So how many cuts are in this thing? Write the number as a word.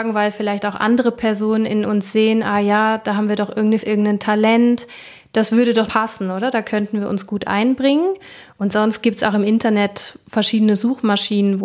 two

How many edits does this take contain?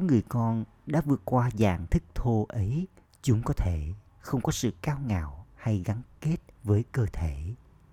two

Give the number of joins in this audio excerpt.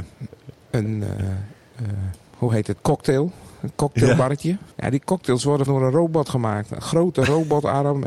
three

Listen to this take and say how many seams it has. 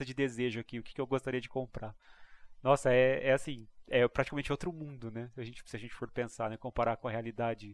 zero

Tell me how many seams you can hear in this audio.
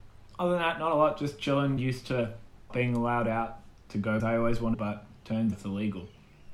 five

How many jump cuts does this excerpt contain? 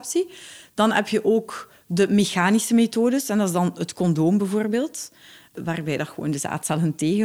zero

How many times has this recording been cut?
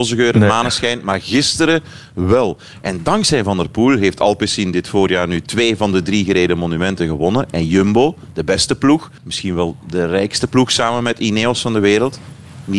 one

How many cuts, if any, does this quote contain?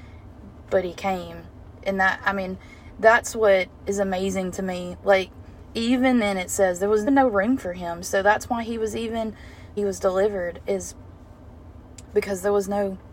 two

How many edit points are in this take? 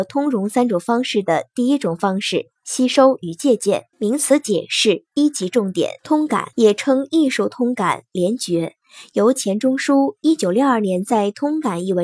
three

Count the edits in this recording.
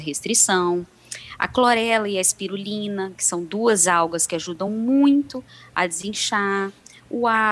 zero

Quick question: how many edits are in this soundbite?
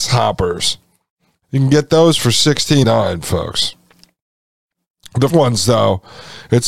two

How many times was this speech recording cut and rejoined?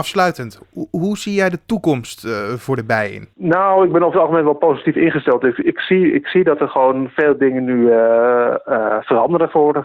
zero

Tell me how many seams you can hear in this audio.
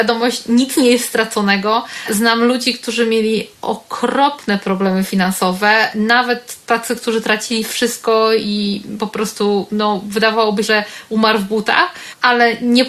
one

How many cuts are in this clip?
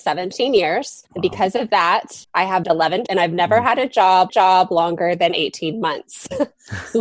five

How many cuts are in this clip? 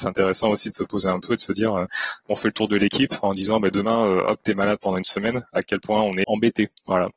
two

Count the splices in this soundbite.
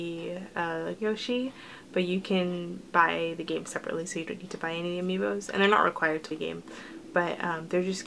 two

